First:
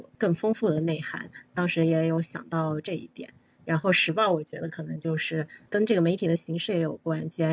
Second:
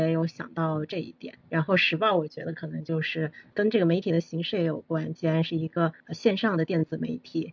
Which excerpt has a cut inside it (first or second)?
second